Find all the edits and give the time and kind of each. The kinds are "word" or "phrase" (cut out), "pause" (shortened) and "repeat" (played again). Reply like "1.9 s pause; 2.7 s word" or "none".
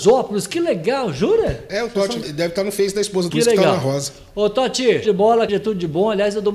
2.2 s word; 3.3 s word; 5.0 s word; 5.5 s word

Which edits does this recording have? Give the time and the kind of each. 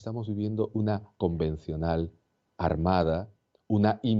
1.2 s word

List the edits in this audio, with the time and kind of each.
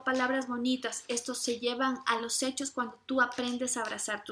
none

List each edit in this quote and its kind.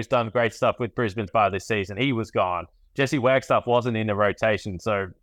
1.3 s word

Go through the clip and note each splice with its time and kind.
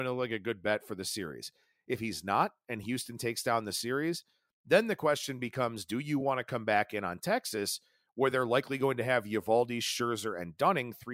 none

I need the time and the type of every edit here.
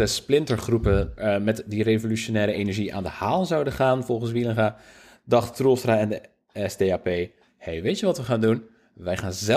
none

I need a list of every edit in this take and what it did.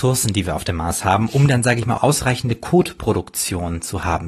2.0 s phrase

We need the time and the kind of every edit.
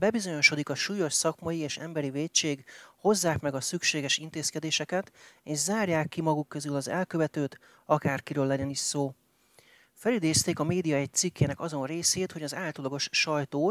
none

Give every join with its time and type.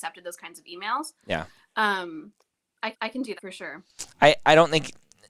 2.9 s repeat; 3.4 s word

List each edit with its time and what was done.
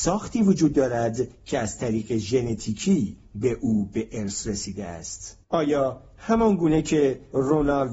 5.4 s pause

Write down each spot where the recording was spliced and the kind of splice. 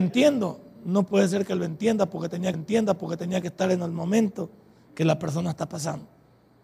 2.5 s repeat

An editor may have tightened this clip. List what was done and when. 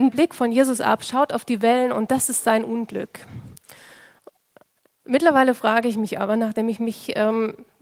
none

